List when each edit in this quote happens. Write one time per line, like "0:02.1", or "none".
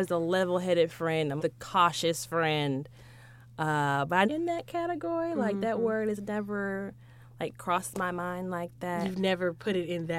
0:01.4
0:04.2